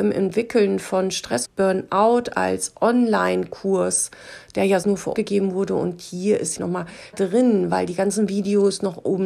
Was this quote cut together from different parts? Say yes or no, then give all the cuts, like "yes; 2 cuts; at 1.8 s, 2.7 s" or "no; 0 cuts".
yes; 5 cuts; at 1.4 s, 4.8 s, 5.1 s, 6.6 s, 7.1 s